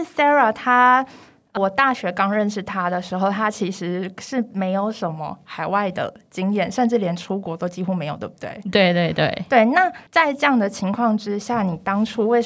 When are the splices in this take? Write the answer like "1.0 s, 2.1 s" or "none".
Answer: 1.6 s, 10.1 s

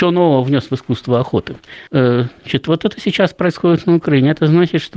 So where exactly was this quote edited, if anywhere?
1.9 s

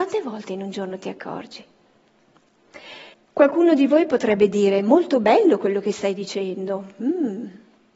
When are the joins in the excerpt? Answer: 3.1 s

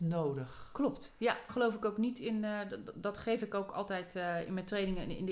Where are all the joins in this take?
1.5 s

